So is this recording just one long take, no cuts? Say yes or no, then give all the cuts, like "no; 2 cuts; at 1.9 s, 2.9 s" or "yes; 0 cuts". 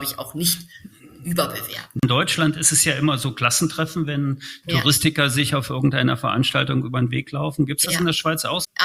yes; 0 cuts